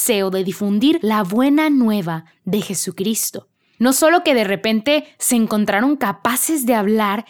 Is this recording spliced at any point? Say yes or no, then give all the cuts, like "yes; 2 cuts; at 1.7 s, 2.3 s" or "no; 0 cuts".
no; 0 cuts